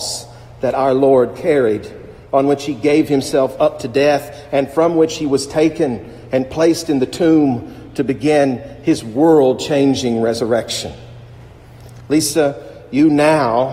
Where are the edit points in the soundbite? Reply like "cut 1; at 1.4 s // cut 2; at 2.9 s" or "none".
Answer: none